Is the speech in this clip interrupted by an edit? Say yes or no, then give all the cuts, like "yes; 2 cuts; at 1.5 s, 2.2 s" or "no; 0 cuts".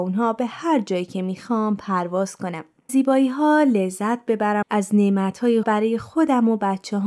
yes; 3 cuts; at 2.9 s, 4.6 s, 5.6 s